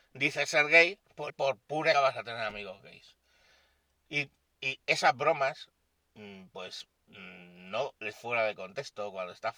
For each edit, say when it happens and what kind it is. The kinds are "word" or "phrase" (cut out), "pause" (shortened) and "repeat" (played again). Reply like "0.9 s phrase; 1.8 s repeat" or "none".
1.3 s word; 1.9 s word; 4.5 s word; 7.0 s pause; 8.1 s phrase